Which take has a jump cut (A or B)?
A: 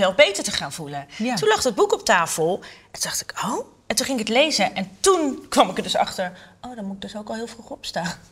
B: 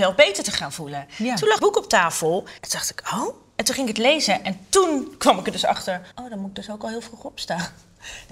B